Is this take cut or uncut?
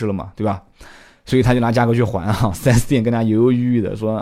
uncut